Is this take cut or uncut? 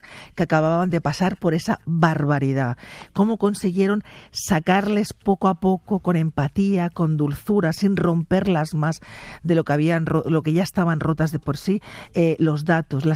uncut